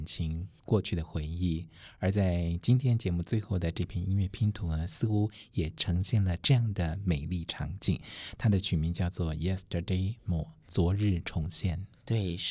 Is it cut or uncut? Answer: cut